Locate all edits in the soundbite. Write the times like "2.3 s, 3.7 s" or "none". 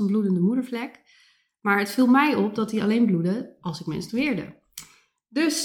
none